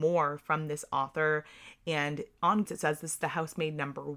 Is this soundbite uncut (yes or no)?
no